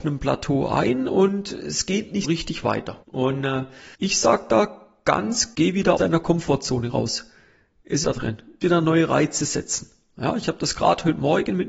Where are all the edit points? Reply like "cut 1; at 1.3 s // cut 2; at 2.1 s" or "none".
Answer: cut 1; at 2.2 s // cut 2; at 3.0 s // cut 3; at 3.9 s // cut 4; at 5.5 s // cut 5; at 6.0 s // cut 6; at 8.0 s // cut 7; at 8.6 s